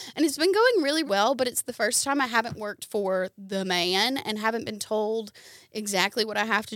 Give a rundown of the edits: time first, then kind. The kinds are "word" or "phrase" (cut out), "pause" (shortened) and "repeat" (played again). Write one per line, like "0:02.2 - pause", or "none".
0:01.1 - word